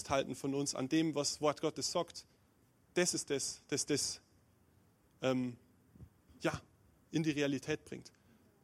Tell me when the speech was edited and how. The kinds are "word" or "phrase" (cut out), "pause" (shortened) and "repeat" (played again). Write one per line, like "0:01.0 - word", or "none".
none